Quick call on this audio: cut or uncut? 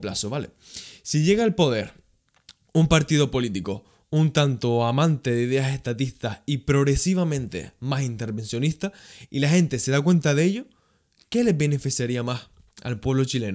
uncut